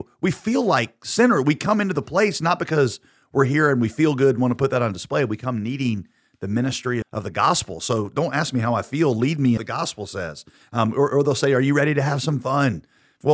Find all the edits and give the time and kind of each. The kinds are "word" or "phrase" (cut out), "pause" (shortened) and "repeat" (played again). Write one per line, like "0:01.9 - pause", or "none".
0:07.0 - word
0:09.6 - phrase